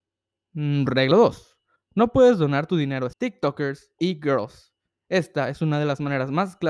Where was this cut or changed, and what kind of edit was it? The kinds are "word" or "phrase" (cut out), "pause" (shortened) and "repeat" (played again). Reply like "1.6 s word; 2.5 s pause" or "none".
1.1 s word; 1.8 s pause; 3.1 s word; 4.0 s word